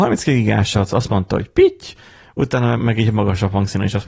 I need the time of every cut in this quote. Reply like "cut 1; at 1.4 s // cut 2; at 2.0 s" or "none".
cut 1; at 2.8 s